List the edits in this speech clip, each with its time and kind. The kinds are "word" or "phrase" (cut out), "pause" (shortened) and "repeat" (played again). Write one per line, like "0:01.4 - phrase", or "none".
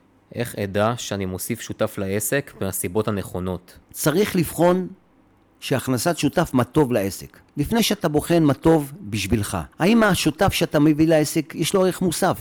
0:03.8 - pause
0:07.5 - pause
0:09.7 - pause